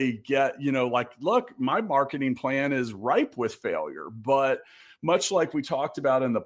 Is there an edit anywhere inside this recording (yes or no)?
no